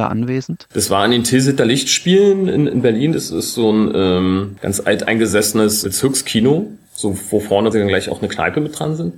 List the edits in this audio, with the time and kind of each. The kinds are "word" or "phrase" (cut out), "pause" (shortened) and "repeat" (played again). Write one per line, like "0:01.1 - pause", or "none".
0:05.8 - word
0:07.7 - word